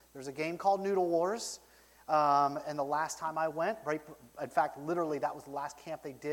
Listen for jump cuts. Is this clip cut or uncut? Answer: uncut